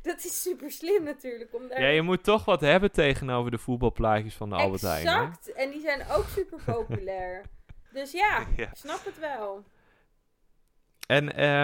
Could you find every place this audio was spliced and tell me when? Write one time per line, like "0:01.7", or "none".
0:07.9